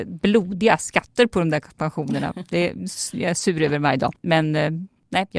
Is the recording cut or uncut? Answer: uncut